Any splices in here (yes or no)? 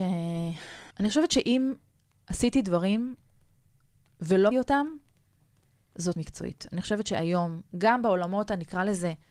yes